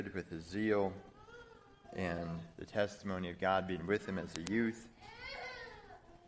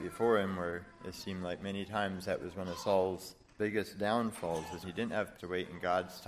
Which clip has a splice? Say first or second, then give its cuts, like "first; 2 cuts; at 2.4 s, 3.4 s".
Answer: second; 3 cuts; at 3.5 s, 4.8 s, 5.4 s